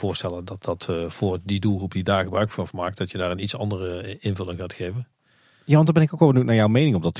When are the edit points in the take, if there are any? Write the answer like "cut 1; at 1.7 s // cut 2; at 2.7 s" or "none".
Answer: none